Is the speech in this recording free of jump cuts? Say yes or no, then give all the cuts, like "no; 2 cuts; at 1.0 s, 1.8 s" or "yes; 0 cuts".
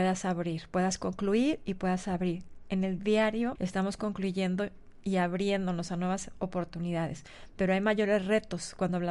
no; 1 cut; at 3.6 s